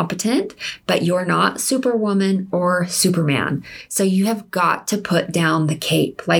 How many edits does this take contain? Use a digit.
0